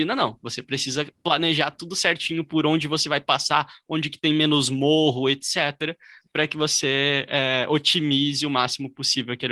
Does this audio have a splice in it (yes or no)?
no